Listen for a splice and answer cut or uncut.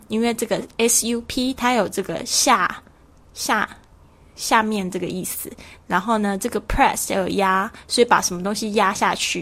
uncut